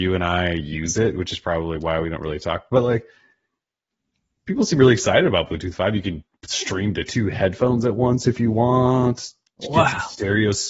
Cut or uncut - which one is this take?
uncut